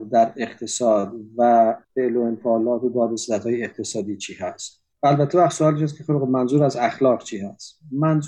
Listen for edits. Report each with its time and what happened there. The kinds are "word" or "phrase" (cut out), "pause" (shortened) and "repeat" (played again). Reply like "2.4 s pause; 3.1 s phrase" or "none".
1.8 s pause; 4.9 s pause